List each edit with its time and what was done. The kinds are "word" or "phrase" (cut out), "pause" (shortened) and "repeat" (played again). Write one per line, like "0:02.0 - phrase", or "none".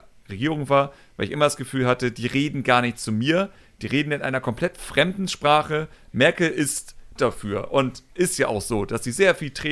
0:07.2 - word